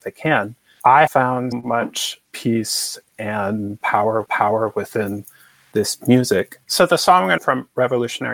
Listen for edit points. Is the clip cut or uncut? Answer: cut